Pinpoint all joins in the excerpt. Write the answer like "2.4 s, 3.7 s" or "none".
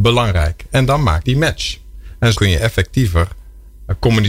1.2 s, 2.3 s